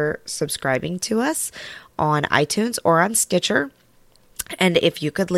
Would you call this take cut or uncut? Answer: uncut